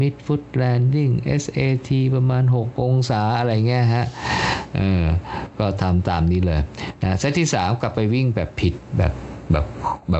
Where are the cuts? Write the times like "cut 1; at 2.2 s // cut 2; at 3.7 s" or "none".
none